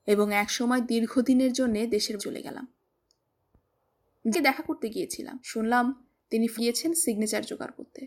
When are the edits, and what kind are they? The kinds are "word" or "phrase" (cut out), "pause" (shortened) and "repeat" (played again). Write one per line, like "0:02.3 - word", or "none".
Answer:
0:02.2 - word
0:04.3 - word
0:05.4 - pause
0:06.6 - word